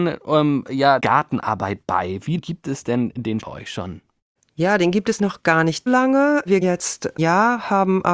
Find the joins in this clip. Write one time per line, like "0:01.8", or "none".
0:01.0
0:02.4
0:03.4
0:05.2
0:05.9
0:06.6
0:07.2